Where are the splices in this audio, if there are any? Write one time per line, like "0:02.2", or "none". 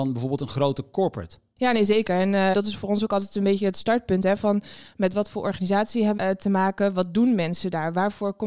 0:02.5
0:06.2